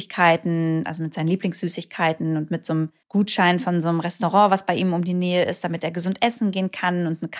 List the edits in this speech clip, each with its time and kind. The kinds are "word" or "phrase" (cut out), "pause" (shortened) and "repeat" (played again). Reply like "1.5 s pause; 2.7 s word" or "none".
3.0 s pause

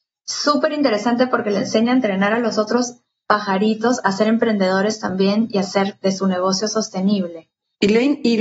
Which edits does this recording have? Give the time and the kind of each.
6.0 s word

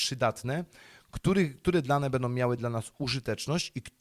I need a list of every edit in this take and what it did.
none

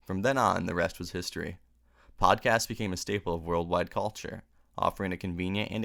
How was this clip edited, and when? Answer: none

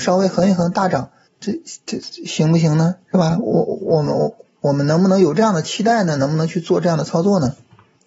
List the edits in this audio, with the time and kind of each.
1.3 s pause

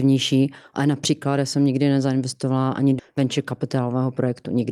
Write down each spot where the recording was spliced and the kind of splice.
3.0 s word

